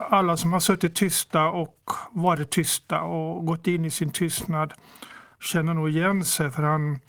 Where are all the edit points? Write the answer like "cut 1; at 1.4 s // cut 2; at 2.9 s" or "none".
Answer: cut 1; at 5.3 s